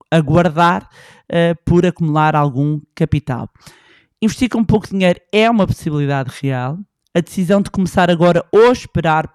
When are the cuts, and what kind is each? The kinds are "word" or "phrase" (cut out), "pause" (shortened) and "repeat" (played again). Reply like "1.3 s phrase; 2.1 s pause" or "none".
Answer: none